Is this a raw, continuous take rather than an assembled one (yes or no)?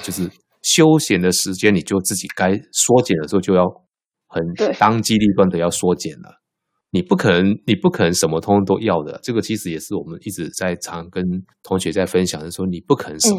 no